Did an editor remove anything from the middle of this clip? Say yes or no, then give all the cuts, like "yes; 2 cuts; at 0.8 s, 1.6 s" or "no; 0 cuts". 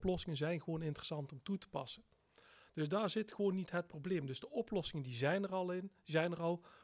no; 0 cuts